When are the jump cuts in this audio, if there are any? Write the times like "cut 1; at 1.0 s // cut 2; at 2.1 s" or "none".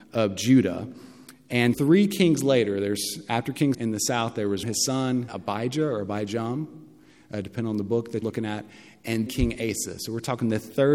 cut 1; at 1.7 s // cut 2; at 3.7 s // cut 3; at 4.6 s // cut 4; at 5.3 s // cut 5; at 8.2 s // cut 6; at 9.3 s